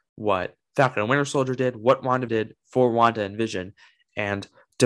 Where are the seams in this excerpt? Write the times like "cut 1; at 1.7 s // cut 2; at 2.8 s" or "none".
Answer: cut 1; at 2.3 s